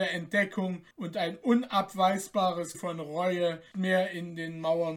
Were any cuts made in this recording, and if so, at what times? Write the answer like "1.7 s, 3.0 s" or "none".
0.9 s, 2.7 s, 3.7 s